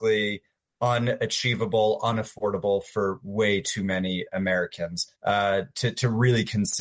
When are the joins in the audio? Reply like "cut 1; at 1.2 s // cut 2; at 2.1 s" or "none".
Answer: cut 1; at 5.2 s